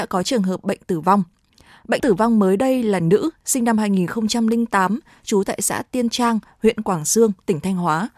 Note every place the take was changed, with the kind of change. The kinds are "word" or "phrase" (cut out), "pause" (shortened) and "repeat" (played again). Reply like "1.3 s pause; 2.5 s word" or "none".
2.0 s word